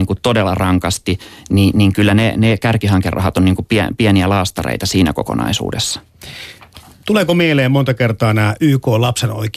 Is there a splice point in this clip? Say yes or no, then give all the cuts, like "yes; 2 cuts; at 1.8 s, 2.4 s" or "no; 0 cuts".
no; 0 cuts